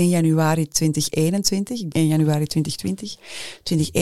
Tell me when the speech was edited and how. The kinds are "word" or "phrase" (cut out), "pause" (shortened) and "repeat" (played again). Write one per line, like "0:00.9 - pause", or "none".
0:01.9 - phrase